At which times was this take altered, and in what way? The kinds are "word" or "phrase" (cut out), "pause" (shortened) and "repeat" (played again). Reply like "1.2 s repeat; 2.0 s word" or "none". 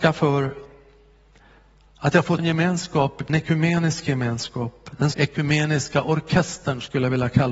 2.4 s word; 3.3 s word; 5.1 s word